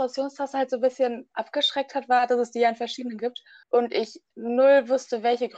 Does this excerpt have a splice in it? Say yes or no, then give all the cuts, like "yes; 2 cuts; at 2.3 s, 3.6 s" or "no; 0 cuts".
yes; 3 cuts; at 3.2 s, 3.6 s, 4.3 s